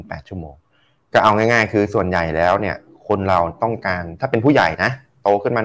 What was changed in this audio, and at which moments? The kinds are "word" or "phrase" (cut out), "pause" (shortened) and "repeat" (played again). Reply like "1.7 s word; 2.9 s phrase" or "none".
none